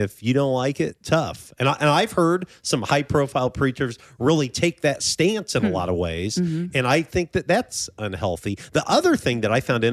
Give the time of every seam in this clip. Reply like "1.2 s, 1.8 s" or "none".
none